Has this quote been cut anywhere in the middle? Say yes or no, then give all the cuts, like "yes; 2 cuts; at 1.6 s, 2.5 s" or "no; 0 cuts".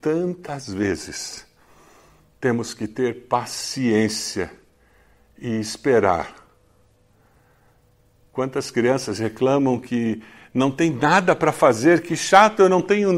no; 0 cuts